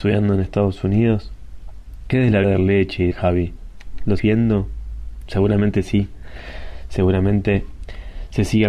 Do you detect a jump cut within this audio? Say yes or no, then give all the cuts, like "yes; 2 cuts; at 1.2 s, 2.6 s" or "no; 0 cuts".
yes; 3 cuts; at 2.4 s, 3.1 s, 4.2 s